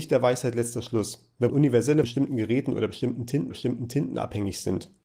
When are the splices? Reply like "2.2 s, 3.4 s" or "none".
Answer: 1.5 s, 2.0 s, 3.5 s